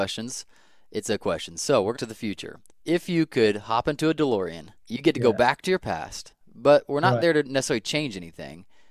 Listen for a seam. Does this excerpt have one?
yes; 4 cuts; at 1.2 s, 1.9 s, 2.7 s, 4.8 s

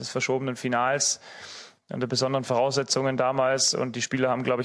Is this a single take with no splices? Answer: yes; 0 cuts

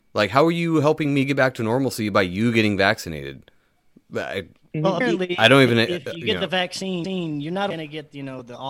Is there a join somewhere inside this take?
no; 0 cuts

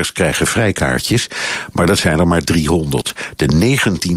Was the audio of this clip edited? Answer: no; 0 cuts

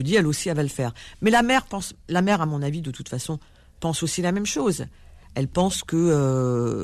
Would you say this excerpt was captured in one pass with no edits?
yes; 0 cuts

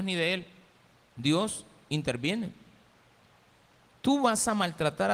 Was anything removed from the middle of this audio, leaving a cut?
yes; 1 cut; at 0.9 s

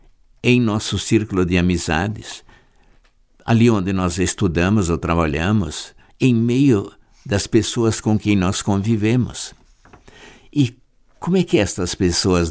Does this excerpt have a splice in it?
no; 0 cuts

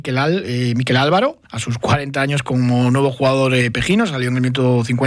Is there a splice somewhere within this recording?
yes; 1 cut; at 1.4 s

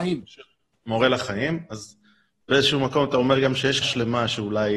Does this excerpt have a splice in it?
yes; 1 cut; at 3.8 s

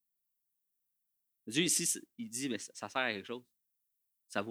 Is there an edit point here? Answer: no; 0 cuts

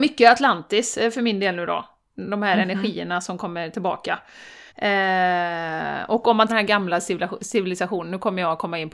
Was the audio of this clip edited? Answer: yes; 2 cuts; at 4.7 s, 6.5 s

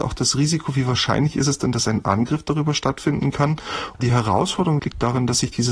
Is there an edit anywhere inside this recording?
no; 0 cuts

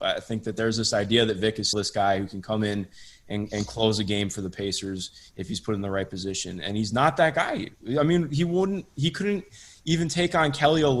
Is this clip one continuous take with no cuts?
no; 1 cut; at 1.7 s

